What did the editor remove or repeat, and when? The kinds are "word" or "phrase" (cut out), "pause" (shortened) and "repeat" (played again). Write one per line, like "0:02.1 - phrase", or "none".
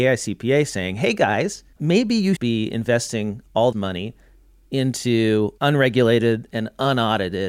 0:01.7 - pause
0:02.4 - word
0:03.7 - word
0:05.6 - pause

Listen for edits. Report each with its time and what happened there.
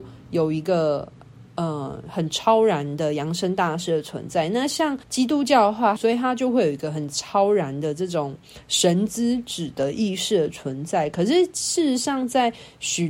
0:05.0 - pause
0:06.0 - phrase

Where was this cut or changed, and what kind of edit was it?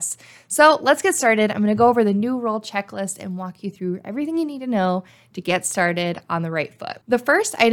none

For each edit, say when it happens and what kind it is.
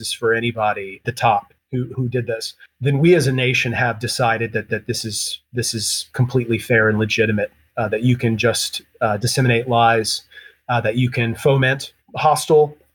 0:01.0 - phrase
0:01.9 - word
0:04.7 - repeat

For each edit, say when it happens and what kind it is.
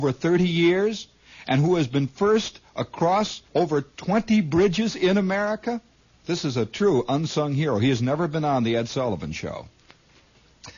0:03.5 - pause
0:06.0 - pause

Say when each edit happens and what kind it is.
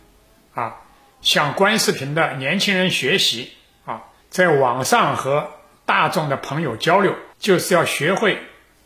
0:04.2 - pause
0:07.3 - pause

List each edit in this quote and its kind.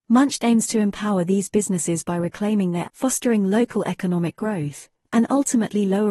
0:02.8 - word

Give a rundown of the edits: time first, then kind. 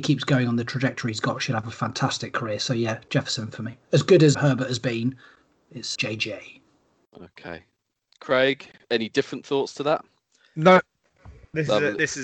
0:04.3 - word
0:06.0 - word
0:08.8 - word

